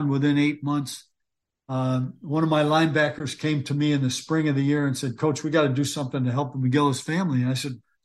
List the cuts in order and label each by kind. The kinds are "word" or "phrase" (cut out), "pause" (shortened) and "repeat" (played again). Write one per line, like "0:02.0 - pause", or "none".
none